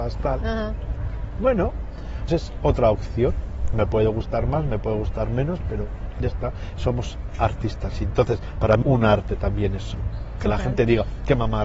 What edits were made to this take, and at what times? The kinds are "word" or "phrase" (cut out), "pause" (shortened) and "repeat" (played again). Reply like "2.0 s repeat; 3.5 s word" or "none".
2.3 s word; 8.8 s word; 10.4 s word